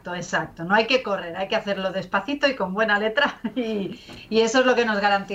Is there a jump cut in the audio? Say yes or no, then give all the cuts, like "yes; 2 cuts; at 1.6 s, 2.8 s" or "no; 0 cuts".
no; 0 cuts